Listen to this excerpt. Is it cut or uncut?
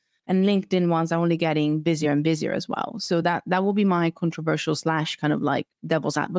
uncut